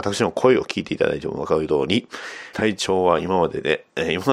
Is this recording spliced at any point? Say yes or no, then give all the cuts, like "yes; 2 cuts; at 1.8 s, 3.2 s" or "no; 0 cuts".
yes; 1 cut; at 2.5 s